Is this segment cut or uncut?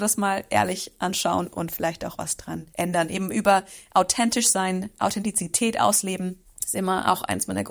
cut